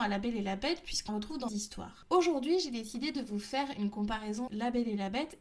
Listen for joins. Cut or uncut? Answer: cut